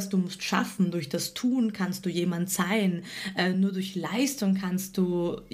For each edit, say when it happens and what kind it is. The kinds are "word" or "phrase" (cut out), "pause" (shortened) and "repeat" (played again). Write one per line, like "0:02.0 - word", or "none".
none